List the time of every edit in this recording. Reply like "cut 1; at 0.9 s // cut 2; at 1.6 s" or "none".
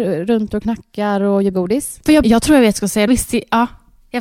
cut 1; at 1.5 s // cut 2; at 2.2 s // cut 3; at 3.1 s

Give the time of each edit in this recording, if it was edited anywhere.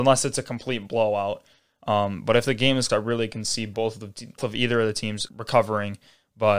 cut 1; at 2.9 s // cut 2; at 4.4 s // cut 3; at 5.3 s

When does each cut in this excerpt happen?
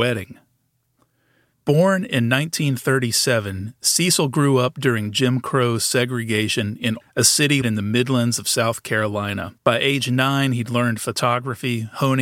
cut 1; at 7.0 s // cut 2; at 7.6 s // cut 3; at 9.6 s

